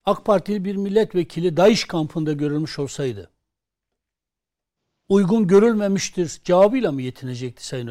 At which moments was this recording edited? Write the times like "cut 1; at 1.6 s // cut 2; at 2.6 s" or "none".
none